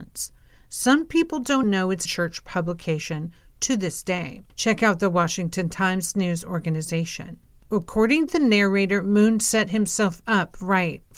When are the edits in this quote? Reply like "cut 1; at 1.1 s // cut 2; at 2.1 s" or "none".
cut 1; at 1.6 s // cut 2; at 2.1 s // cut 3; at 8.3 s